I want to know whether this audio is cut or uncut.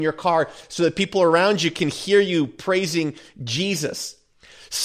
uncut